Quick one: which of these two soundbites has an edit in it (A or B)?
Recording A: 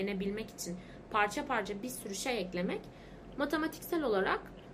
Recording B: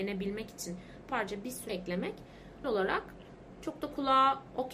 B